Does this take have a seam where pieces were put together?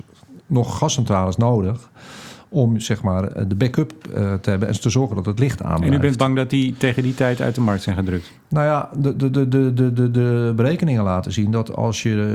no; 0 cuts

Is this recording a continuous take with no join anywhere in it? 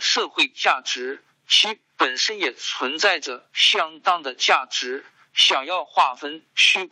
yes; 0 cuts

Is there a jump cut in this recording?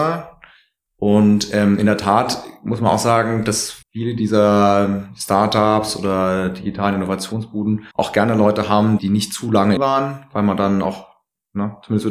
yes; 4 cuts; at 3.8 s, 7.9 s, 9.0 s, 9.8 s

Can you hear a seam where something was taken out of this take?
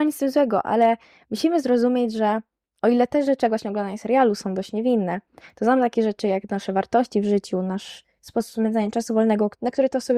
no; 0 cuts

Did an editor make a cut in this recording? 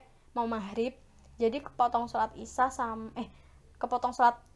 no; 0 cuts

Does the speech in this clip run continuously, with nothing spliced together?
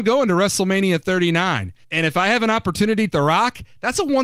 no; 2 cuts; at 1.8 s, 3.1 s

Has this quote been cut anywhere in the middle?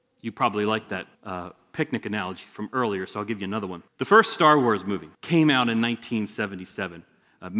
yes; 3 cuts; at 1.1 s, 3.9 s, 5.1 s

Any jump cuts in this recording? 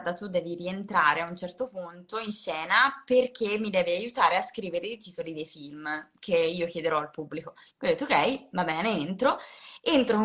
yes; 1 cut; at 7.7 s

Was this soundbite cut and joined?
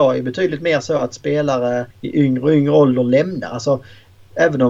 yes; 1 cut; at 1.9 s

